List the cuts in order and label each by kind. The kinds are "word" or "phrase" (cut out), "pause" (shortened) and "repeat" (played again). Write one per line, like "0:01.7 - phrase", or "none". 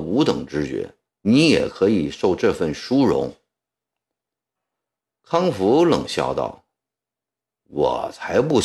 0:01.1 - pause